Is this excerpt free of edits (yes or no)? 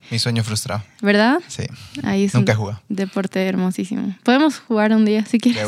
yes